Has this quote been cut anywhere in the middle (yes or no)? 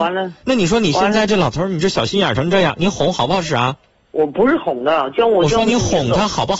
yes